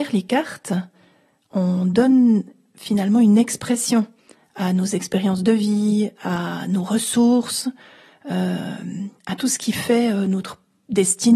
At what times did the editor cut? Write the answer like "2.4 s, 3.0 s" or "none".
none